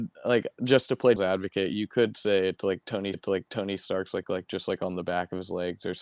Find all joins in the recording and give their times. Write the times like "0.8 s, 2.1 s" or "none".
1.2 s, 3.1 s, 4.2 s